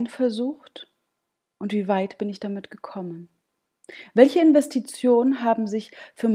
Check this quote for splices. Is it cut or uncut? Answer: uncut